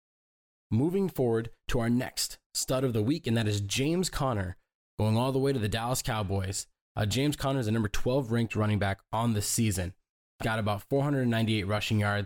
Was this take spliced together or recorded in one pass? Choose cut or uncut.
cut